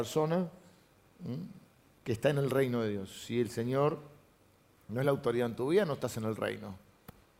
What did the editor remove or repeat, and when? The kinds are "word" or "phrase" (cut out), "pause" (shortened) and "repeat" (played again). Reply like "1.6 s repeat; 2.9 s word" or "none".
none